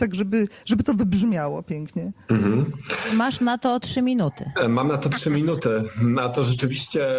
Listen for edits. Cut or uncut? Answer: uncut